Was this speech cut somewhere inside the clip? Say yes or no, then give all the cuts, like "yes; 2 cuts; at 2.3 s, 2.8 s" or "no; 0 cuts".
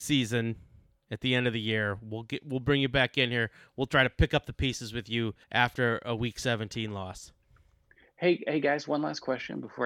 yes; 1 cut; at 5.4 s